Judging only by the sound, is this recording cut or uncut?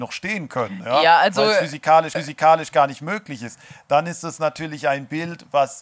cut